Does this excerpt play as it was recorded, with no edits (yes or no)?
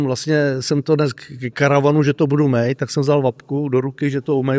no